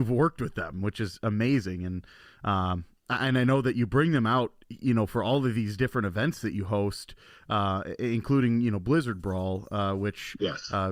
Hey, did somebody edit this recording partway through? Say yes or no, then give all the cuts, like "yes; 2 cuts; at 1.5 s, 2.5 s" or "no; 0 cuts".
no; 0 cuts